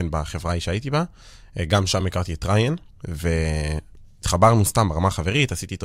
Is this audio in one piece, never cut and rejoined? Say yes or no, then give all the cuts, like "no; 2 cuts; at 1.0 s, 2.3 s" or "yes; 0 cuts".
yes; 0 cuts